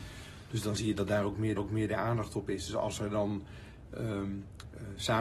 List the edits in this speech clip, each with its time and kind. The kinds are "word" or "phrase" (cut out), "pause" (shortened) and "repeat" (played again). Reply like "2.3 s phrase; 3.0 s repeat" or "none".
1.6 s repeat